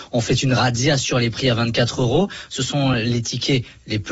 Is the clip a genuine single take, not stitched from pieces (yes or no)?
yes